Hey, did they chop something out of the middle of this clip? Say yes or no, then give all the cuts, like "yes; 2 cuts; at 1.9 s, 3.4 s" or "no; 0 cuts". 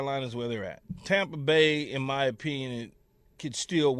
no; 0 cuts